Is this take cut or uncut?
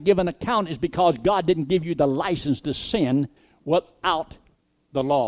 cut